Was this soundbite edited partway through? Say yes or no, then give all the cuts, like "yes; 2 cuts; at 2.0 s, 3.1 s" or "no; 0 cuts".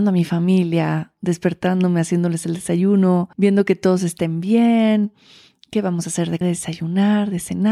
yes; 2 cuts; at 3.3 s, 6.4 s